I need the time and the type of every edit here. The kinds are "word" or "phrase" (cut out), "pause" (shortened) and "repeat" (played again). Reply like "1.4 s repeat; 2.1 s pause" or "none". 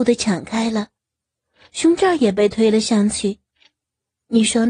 none